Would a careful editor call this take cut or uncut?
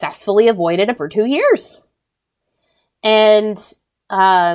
cut